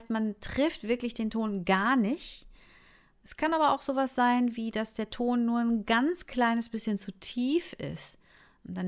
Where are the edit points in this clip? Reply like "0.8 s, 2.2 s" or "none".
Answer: none